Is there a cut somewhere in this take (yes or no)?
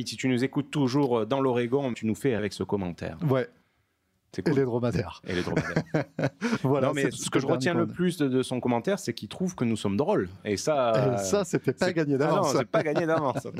yes